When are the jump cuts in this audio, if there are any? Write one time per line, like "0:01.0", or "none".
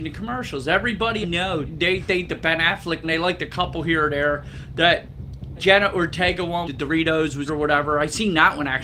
0:01.2
0:01.6
0:02.3
0:03.0
0:05.6
0:06.6
0:07.5